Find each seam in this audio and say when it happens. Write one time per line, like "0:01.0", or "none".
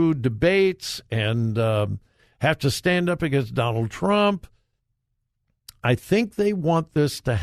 none